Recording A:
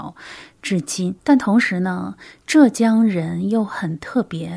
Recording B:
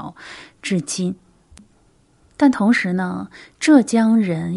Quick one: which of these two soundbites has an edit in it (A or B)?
A